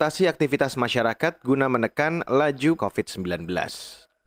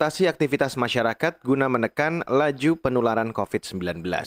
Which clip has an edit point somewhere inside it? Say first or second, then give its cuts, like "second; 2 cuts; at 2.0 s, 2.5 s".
first; 1 cut; at 2.8 s